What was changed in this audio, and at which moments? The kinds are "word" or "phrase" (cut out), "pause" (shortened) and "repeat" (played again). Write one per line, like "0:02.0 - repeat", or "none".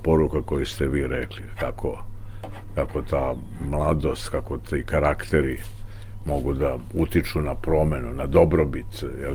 none